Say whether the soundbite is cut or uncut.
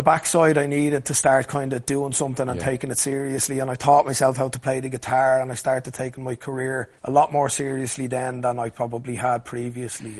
cut